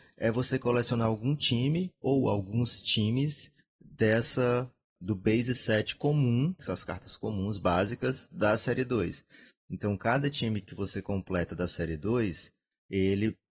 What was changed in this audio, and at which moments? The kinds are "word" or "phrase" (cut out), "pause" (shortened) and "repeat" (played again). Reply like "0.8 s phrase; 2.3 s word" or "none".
6.6 s word